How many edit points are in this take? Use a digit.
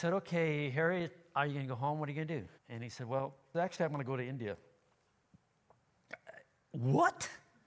2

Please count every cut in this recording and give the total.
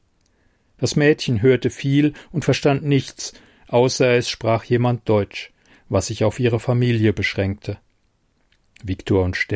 0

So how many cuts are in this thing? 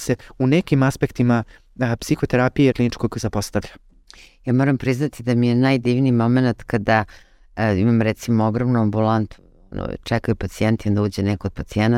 1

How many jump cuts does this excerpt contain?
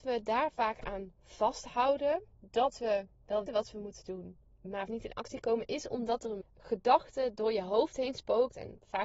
3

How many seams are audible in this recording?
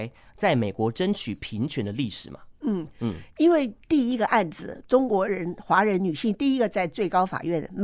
1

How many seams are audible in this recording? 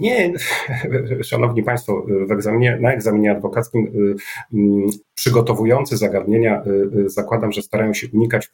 1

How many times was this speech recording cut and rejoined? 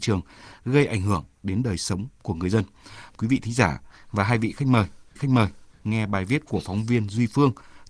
2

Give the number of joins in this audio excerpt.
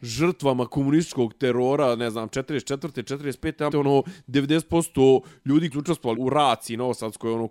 3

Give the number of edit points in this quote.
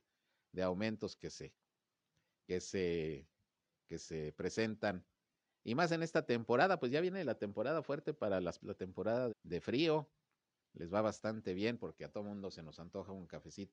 2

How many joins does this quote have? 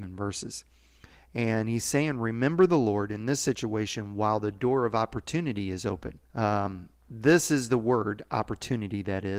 1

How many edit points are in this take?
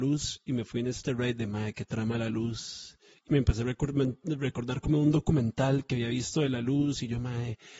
1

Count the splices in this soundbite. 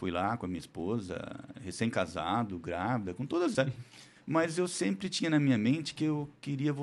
1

